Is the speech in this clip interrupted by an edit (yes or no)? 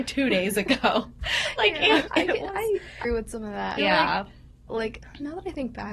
yes